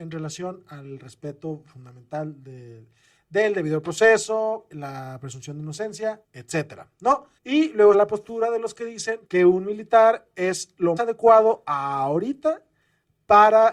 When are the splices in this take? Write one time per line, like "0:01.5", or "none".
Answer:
0:04.7
0:06.2
0:07.4
0:07.9
0:09.3
0:11.0

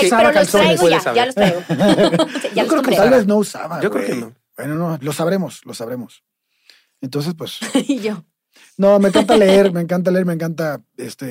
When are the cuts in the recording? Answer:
none

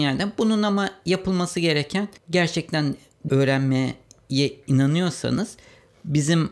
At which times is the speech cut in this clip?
0:02.2
0:03.3

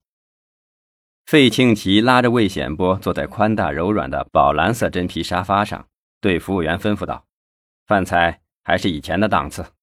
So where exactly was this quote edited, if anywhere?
0:07.4

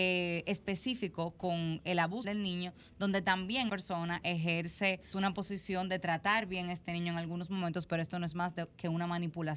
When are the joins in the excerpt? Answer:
0:02.2
0:03.7
0:05.1

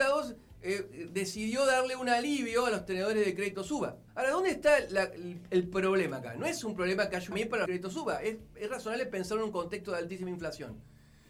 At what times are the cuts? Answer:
0:04.1
0:07.3
0:07.7

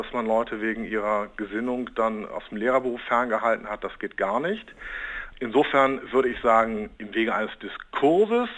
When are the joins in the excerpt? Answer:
none

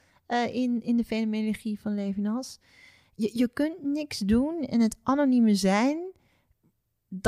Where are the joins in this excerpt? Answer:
none

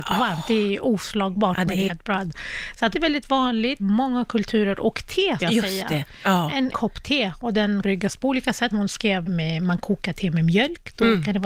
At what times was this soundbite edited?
0:01.9
0:02.9
0:03.8
0:05.4
0:06.7
0:07.8
0:08.7
0:09.3

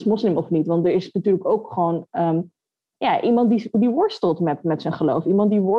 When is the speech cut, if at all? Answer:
none

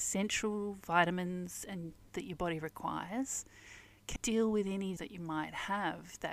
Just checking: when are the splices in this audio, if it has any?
0:02.1
0:04.2
0:05.0

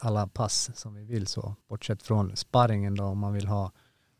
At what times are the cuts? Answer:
0:01.6

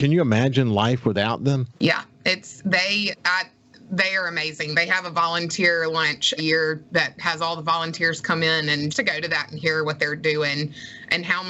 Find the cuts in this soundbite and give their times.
0:01.8
0:06.4
0:08.9

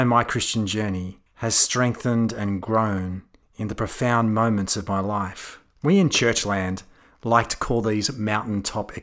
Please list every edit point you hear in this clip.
0:01.3
0:03.4
0:05.7

